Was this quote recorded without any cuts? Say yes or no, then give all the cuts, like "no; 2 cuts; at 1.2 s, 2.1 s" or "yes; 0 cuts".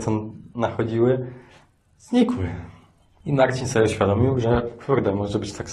yes; 0 cuts